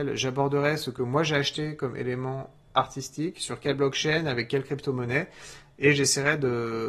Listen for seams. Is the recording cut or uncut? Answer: uncut